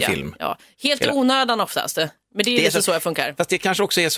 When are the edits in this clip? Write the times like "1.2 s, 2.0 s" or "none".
none